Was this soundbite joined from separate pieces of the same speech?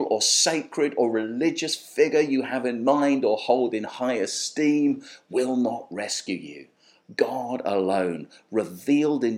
no; 0 cuts

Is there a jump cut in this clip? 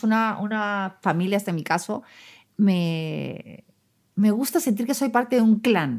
no; 0 cuts

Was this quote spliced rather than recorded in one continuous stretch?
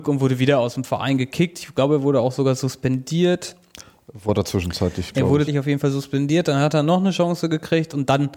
yes; 1 cut; at 5.5 s

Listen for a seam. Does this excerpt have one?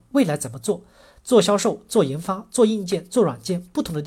no; 0 cuts

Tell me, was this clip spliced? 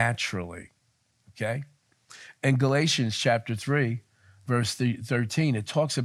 no; 0 cuts

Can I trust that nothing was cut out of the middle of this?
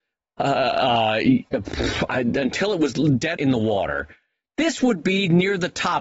no; 1 cut; at 3.4 s

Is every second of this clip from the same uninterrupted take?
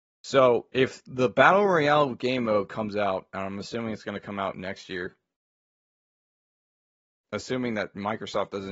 yes; 0 cuts

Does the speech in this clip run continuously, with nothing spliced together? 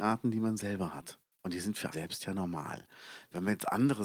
no; 1 cut; at 1.9 s

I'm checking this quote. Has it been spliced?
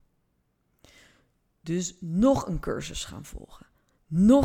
no; 0 cuts

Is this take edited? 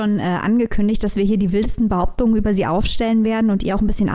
no; 0 cuts

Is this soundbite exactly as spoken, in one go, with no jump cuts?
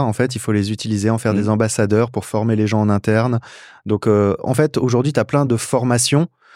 yes; 0 cuts

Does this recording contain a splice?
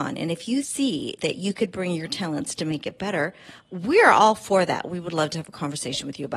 no; 0 cuts

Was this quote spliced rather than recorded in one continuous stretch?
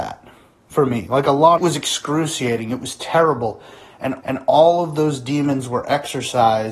yes; 2 cuts; at 1.6 s, 4.2 s

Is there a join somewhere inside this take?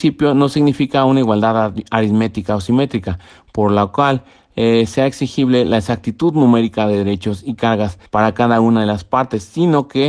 yes; 1 cut; at 8.1 s

